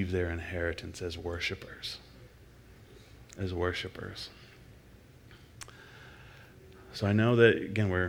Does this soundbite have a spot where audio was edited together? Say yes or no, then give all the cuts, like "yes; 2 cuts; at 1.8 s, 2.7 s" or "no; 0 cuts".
no; 0 cuts